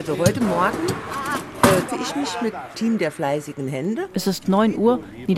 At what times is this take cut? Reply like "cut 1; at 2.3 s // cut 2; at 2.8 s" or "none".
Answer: cut 1; at 1.9 s // cut 2; at 2.7 s